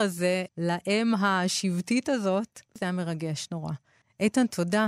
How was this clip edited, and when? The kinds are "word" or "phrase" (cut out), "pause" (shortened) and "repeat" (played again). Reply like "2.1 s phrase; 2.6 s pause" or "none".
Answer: none